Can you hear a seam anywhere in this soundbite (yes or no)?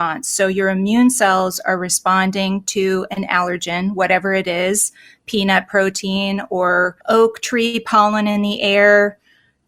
yes